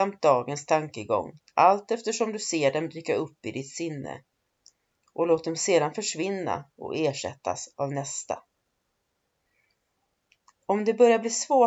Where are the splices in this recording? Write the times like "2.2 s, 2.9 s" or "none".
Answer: 1.4 s